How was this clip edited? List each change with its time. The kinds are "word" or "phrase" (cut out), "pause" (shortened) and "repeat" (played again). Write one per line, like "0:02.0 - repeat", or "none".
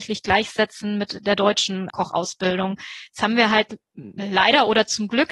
none